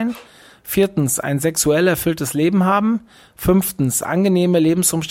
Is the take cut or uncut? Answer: uncut